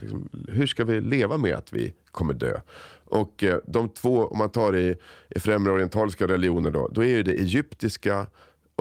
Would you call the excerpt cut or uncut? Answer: uncut